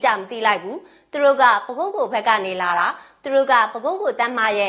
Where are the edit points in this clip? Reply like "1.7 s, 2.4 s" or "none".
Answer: none